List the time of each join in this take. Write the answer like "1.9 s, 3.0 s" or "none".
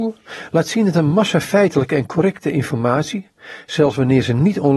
none